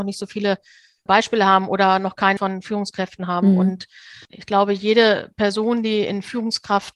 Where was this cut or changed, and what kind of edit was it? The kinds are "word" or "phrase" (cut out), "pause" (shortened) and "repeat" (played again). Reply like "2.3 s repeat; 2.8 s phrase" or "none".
1.1 s word; 2.4 s phrase; 4.2 s pause